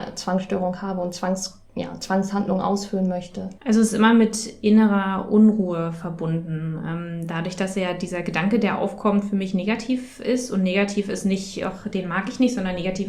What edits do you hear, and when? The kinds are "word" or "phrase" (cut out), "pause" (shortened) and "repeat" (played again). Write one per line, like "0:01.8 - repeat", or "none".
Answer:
0:01.7 - pause
0:03.6 - pause

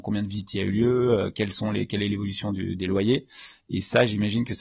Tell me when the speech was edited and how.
none

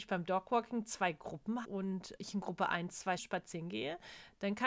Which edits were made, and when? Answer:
0:01.6 - word
0:02.2 - word
0:03.2 - word

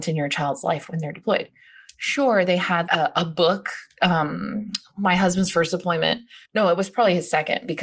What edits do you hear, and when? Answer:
0:02.9 - word
0:06.4 - pause

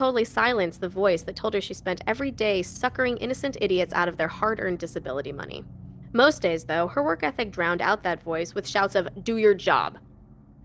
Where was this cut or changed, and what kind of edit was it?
none

